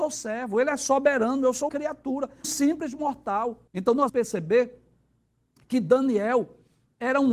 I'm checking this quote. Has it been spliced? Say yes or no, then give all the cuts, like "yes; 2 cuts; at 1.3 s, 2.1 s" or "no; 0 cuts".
yes; 4 cuts; at 1.7 s, 2.4 s, 3.7 s, 4.1 s